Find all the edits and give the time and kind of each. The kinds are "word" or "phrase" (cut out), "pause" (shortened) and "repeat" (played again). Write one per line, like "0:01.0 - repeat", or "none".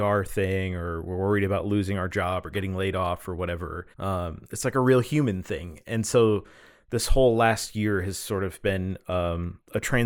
0:03.9 - pause